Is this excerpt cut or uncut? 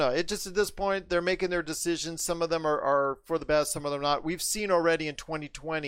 uncut